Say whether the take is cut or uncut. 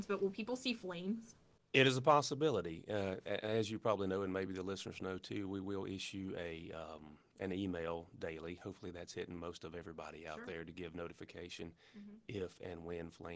uncut